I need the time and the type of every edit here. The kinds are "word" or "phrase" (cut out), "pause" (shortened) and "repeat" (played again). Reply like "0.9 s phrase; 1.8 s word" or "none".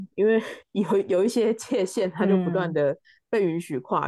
none